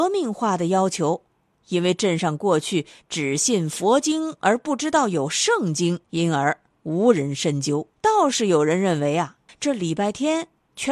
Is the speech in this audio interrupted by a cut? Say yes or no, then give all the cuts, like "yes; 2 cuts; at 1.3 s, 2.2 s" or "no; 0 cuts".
yes; 3 cuts; at 6.0 s, 8.0 s, 9.5 s